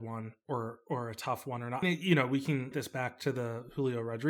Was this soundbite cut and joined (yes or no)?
yes